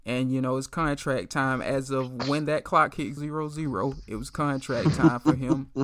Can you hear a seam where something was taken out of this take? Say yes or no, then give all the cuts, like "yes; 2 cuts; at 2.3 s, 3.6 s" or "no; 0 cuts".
yes; 1 cut; at 3.2 s